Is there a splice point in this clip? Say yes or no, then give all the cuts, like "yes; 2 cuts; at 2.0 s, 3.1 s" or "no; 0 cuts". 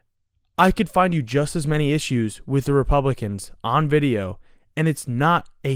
no; 0 cuts